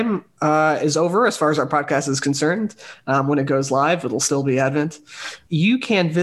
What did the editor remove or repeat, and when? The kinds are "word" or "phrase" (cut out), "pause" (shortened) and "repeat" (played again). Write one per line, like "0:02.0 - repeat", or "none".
none